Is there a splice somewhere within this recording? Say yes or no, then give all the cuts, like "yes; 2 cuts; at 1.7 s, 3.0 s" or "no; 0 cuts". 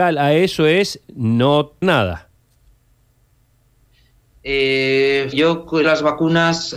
yes; 3 cuts; at 1.8 s, 5.3 s, 5.8 s